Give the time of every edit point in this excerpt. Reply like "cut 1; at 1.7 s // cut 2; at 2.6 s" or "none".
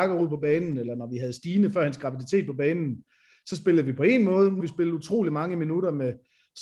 cut 1; at 4.6 s